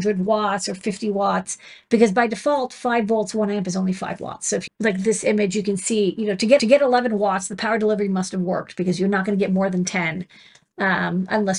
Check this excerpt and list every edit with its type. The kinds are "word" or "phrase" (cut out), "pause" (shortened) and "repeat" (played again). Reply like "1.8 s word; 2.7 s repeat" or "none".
4.7 s phrase; 6.6 s repeat